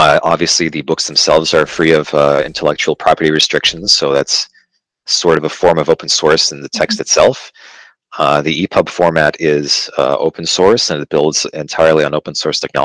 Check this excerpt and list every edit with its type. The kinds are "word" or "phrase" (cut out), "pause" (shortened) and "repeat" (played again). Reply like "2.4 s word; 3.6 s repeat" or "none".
none